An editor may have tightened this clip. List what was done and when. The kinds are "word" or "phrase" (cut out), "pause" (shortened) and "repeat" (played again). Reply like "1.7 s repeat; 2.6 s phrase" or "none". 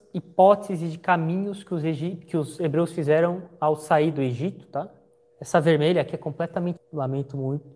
5.1 s pause; 6.8 s word